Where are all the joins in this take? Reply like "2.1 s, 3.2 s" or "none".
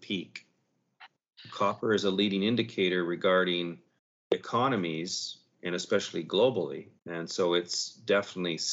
4.0 s, 7.0 s